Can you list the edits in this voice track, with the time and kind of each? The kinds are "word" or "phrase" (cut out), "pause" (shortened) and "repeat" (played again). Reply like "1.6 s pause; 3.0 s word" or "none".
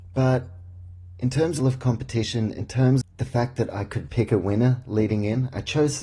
1.6 s word; 3.0 s word; 4.1 s word